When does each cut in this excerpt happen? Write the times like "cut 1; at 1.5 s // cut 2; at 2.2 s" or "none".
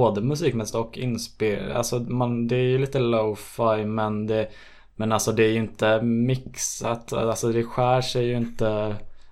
none